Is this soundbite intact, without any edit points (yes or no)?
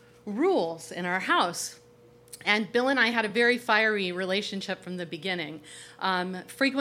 yes